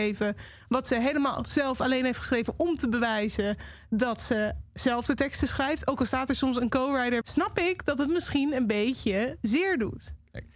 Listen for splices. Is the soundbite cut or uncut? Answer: cut